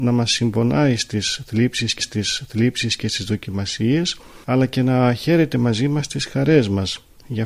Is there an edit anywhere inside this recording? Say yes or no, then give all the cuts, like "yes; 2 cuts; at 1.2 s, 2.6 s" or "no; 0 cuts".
yes; 2 cuts; at 2.0 s, 4.4 s